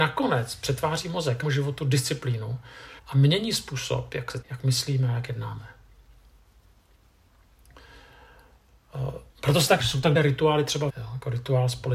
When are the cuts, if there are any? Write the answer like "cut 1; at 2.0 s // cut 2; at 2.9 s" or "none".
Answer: cut 1; at 1.4 s // cut 2; at 3.0 s // cut 3; at 4.4 s // cut 4; at 9.3 s // cut 5; at 9.8 s // cut 6; at 10.1 s // cut 7; at 10.9 s